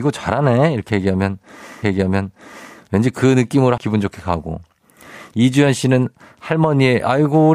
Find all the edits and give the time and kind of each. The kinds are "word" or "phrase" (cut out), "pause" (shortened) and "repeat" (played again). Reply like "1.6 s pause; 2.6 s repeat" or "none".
1.8 s repeat; 3.8 s phrase